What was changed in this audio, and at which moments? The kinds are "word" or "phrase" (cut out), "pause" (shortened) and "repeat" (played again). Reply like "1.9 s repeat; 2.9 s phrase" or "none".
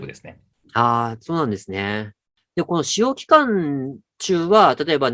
none